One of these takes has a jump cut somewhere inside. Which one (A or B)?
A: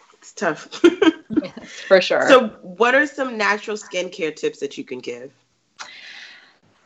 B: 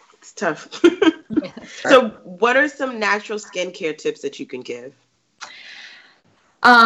B